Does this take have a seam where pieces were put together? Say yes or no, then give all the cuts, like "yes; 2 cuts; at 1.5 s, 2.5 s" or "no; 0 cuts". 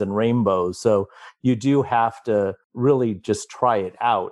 yes; 1 cut; at 2.6 s